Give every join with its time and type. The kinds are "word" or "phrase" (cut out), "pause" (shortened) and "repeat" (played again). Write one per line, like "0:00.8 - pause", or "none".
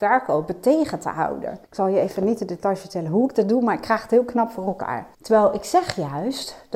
0:01.6 - pause
0:05.1 - pause